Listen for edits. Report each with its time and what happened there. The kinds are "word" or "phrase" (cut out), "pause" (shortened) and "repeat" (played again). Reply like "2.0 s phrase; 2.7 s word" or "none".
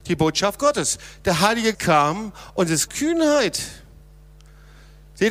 1.7 s word; 2.9 s word